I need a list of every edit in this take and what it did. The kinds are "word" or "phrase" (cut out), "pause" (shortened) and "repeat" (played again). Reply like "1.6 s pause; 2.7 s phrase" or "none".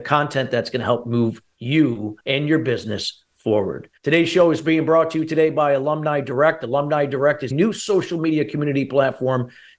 2.2 s pause; 4.0 s pause; 7.5 s word

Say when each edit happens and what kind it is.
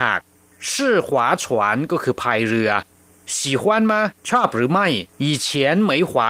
4.2 s pause; 5.1 s pause

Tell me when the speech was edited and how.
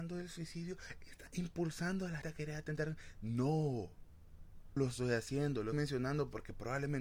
2.2 s word; 4.8 s word; 5.7 s word

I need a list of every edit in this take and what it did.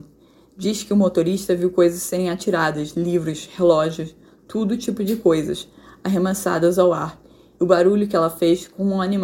none

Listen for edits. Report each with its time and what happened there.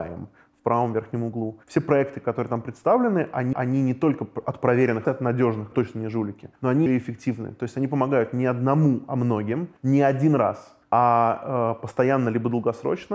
1.6 s pause; 3.5 s repeat; 5.0 s word; 5.7 s word; 6.6 s pause; 6.9 s word; 9.8 s pause; 10.8 s pause

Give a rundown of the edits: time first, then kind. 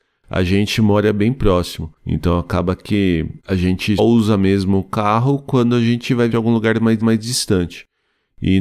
2.0 s pause; 3.4 s pause; 4.0 s word; 6.3 s phrase; 7.0 s repeat

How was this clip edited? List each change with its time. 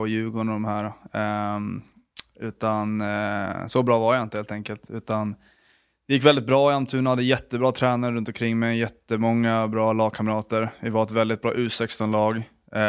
none

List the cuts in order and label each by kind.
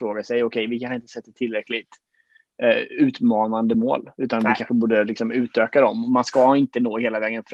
none

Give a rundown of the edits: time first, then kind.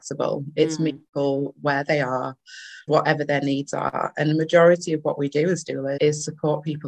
1.1 s pause; 2.9 s word; 6.0 s word

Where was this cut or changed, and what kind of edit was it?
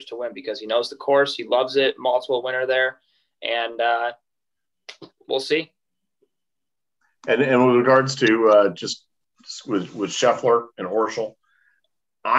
none

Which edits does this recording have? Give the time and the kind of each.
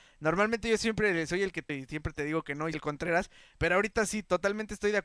1.7 s word; 2.7 s word

